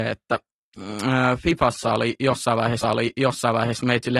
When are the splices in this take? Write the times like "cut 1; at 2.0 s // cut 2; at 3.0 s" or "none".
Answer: cut 1; at 2.8 s